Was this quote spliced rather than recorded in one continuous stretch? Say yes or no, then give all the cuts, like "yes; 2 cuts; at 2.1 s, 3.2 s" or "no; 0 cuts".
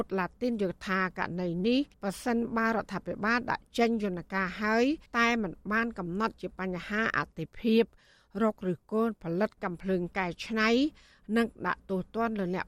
yes; 2 cuts; at 1.9 s, 5.1 s